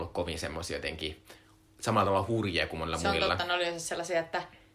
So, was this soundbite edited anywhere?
no; 0 cuts

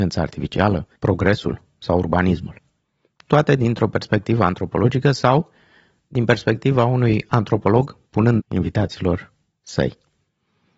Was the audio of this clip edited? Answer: yes; 2 cuts; at 1.0 s, 8.4 s

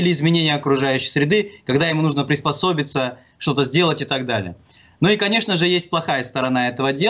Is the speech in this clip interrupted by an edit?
no; 0 cuts

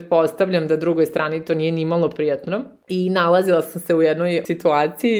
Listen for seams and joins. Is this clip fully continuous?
yes; 0 cuts

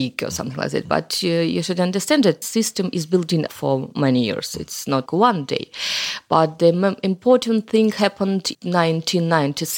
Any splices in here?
yes; 4 cuts; at 2.4 s, 3.5 s, 5.1 s, 8.5 s

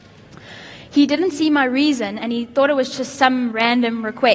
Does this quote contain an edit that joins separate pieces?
no; 0 cuts

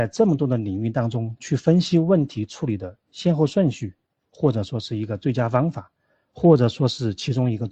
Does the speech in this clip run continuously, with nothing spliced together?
yes; 0 cuts

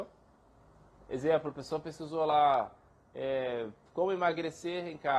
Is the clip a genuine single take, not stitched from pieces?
yes; 0 cuts

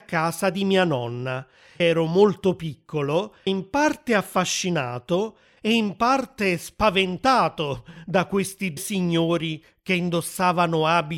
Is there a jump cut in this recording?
yes; 3 cuts; at 1.8 s, 3.5 s, 8.8 s

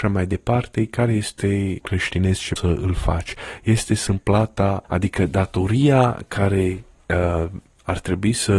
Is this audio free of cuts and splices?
no; 4 cuts; at 1.8 s, 2.6 s, 4.1 s, 4.8 s

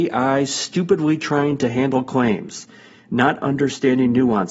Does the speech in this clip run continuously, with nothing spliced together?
yes; 0 cuts

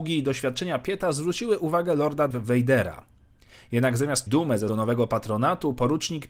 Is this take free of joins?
no; 3 cuts; at 2.3 s, 4.3 s, 4.7 s

